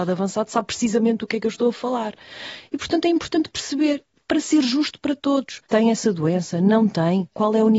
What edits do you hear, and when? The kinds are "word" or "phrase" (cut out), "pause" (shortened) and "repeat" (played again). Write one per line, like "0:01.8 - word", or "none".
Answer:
0:05.6 - pause